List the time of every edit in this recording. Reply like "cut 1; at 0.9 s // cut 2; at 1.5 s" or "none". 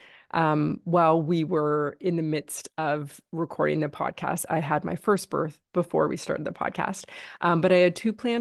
none